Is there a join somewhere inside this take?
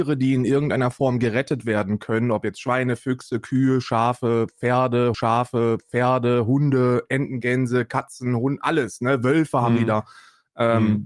yes; 1 cut; at 5.1 s

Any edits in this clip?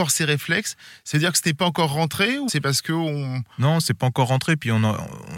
yes; 2 cuts; at 2.5 s, 3.5 s

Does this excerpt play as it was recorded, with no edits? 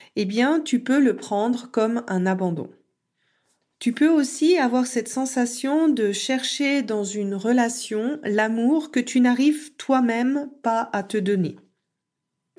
yes; 0 cuts

